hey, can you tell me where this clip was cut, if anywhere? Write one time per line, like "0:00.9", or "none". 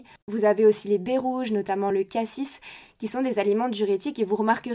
none